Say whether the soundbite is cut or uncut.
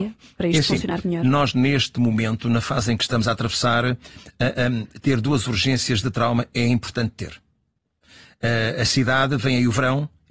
uncut